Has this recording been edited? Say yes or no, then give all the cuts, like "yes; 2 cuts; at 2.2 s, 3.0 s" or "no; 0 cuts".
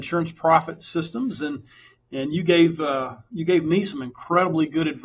no; 0 cuts